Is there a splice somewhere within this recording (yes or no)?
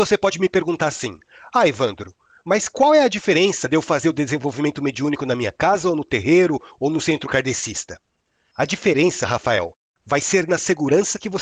no